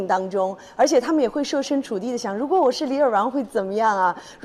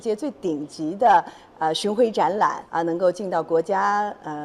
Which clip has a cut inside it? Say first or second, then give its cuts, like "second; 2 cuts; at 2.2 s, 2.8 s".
second; 1 cut; at 2.7 s